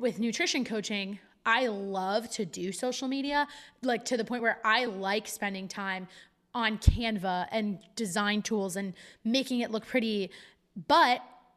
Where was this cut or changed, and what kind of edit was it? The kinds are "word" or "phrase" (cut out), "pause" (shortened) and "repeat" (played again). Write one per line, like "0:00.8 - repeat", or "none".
none